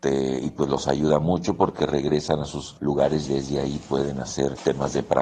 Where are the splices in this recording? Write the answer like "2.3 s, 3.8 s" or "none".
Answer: 3.3 s

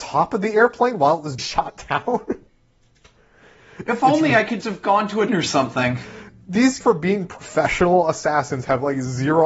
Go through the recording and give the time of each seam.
1.4 s, 4.6 s, 5.3 s, 6.8 s

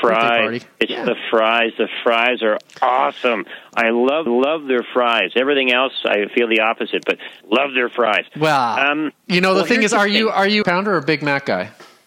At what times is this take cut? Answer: 4.3 s, 7.4 s, 10.6 s

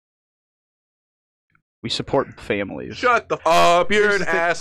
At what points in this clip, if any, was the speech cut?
2.4 s, 3.4 s

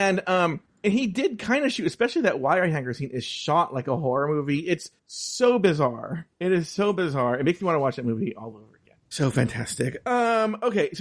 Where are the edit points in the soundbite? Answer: 5.0 s, 9.0 s

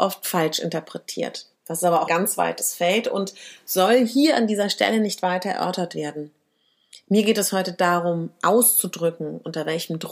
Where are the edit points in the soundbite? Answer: 1.5 s, 2.1 s

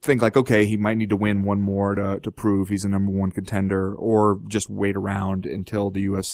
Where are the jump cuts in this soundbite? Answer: none

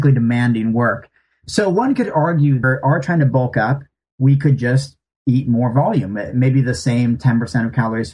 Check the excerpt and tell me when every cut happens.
2.6 s

